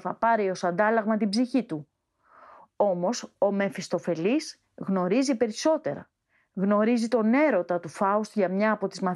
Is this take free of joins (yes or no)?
yes